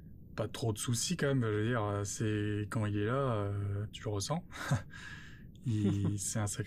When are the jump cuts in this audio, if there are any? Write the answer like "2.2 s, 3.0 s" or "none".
none